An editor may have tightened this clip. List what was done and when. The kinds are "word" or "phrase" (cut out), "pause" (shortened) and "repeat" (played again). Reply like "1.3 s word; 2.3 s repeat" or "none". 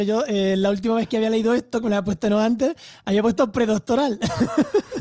none

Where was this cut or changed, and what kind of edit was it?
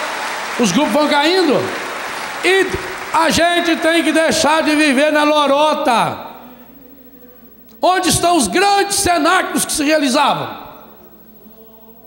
none

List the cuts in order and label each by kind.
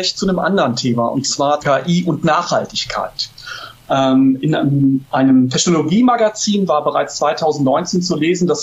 1.6 s word

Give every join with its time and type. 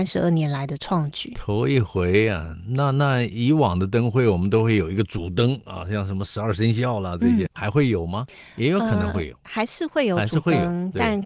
7.5 s word

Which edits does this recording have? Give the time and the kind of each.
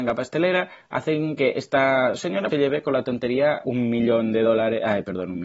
2.5 s word; 3.6 s word

